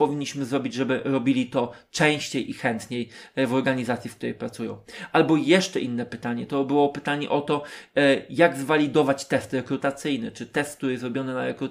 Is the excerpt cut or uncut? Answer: uncut